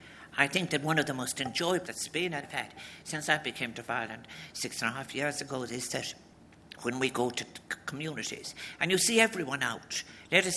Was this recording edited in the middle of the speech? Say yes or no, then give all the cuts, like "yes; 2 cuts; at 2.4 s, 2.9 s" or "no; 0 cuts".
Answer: yes; 3 cuts; at 1.8 s, 2.4 s, 3.7 s